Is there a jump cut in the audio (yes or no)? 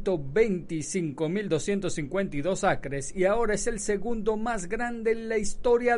no